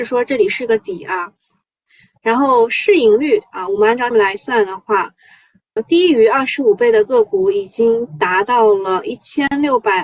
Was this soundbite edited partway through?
yes; 2 cuts; at 4.1 s, 5.8 s

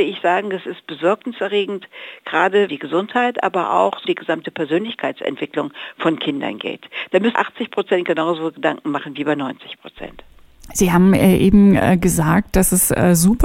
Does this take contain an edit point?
yes; 3 cuts; at 2.7 s, 4.0 s, 7.3 s

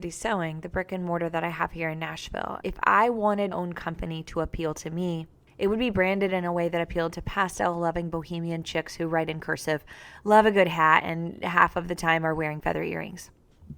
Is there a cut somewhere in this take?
yes; 3 cuts; at 2.6 s, 3.5 s, 5.5 s

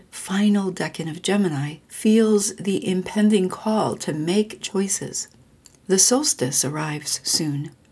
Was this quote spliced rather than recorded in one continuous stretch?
yes; 3 cuts; at 1.8 s, 4.6 s, 5.5 s

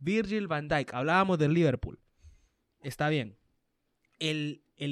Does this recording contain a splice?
no; 0 cuts

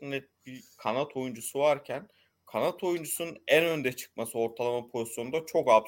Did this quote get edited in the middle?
no; 0 cuts

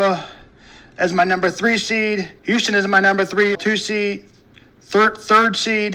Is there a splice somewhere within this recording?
yes; 2 cuts; at 2.4 s, 3.5 s

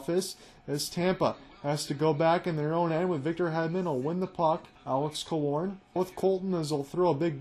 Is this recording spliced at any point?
yes; 2 cuts; at 4.7 s, 6.0 s

